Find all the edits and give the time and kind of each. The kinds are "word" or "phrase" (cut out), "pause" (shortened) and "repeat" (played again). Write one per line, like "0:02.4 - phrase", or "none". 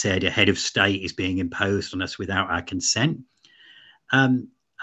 none